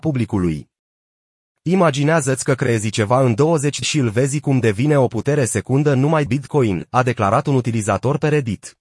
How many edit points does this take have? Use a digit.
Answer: 2